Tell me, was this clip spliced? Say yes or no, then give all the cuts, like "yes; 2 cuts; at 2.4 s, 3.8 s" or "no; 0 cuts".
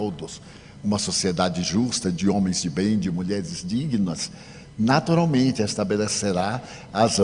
no; 0 cuts